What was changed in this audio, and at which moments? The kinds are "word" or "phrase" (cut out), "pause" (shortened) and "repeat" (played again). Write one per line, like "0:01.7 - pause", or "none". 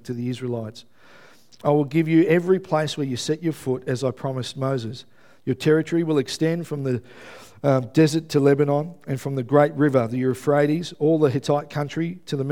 none